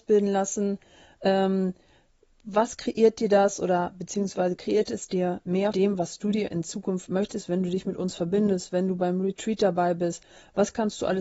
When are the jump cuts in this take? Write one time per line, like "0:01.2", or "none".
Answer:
0:05.7